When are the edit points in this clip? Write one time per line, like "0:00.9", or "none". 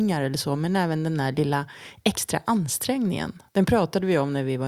0:03.5